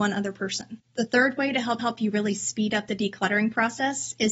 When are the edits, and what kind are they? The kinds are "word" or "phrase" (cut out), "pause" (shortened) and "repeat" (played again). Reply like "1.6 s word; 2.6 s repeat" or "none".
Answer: 1.8 s repeat